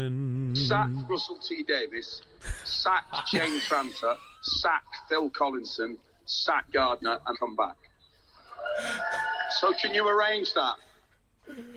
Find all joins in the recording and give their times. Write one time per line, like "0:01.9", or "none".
0:04.3
0:06.7
0:07.3